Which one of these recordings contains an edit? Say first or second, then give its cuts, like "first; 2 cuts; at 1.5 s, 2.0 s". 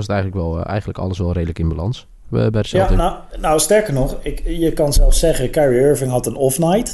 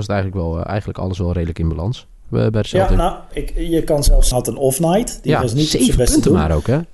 second; 2 cuts; at 3.3 s, 4.3 s